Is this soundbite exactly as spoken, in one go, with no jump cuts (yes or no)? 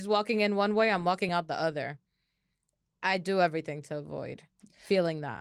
yes